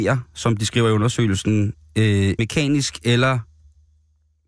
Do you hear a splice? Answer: yes; 1 cut; at 2.4 s

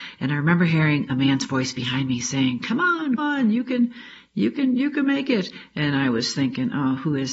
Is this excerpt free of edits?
no; 1 cut; at 3.2 s

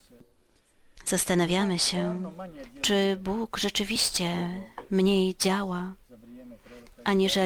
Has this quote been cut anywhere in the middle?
no; 0 cuts

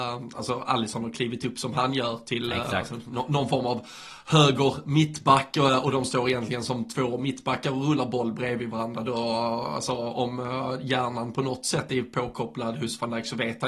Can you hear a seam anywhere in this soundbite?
no; 0 cuts

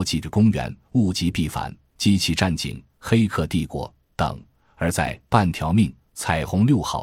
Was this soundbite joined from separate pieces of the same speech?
no; 0 cuts

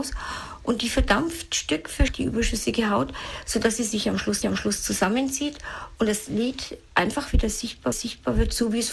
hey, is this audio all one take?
no; 3 cuts; at 2.1 s, 4.4 s, 7.9 s

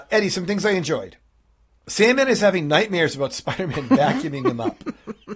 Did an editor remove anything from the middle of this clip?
no; 0 cuts

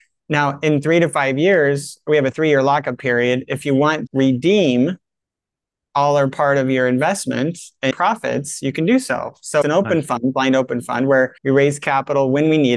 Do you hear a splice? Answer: yes; 4 cuts; at 4.1 s, 7.9 s, 9.6 s, 11.4 s

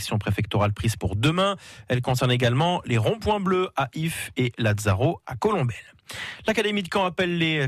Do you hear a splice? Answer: no; 0 cuts

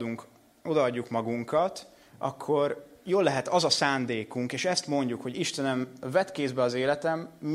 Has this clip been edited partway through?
no; 0 cuts

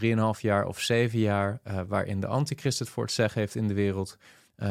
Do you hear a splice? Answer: no; 0 cuts

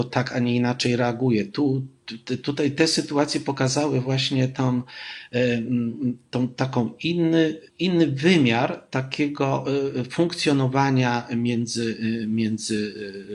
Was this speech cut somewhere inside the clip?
yes; 1 cut; at 7.7 s

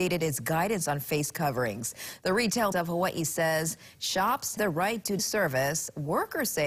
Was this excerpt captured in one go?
no; 3 cuts; at 2.7 s, 4.6 s, 5.2 s

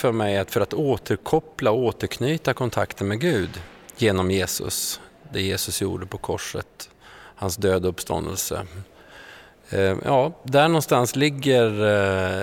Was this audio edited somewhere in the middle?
no; 0 cuts

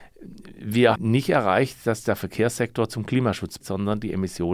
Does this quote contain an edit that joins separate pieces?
yes; 2 cuts; at 1.0 s, 3.6 s

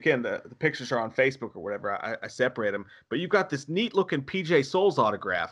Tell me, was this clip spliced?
no; 0 cuts

